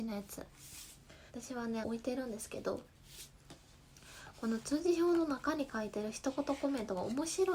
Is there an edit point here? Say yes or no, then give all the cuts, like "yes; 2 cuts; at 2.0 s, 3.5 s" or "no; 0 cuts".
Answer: yes; 2 cuts; at 1.3 s, 1.8 s